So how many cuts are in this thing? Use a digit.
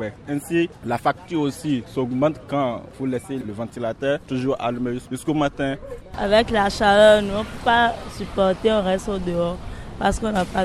0